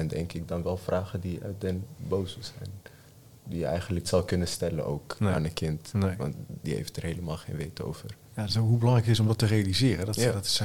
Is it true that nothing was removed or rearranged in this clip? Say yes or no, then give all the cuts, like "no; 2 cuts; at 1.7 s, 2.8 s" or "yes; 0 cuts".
no; 1 cut; at 4.0 s